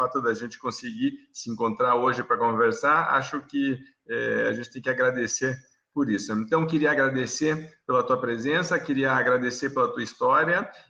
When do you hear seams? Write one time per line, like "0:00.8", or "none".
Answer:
none

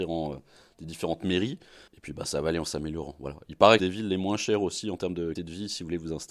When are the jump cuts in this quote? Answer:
0:01.9
0:03.8
0:05.4

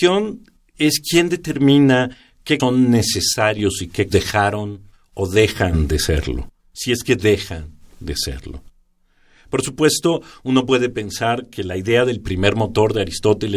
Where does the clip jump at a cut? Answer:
0:02.6
0:04.1

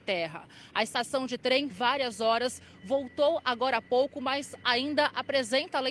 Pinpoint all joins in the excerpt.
0:01.7

